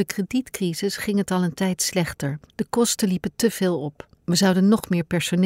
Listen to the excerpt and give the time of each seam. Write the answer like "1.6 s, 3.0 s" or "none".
2.5 s, 4.1 s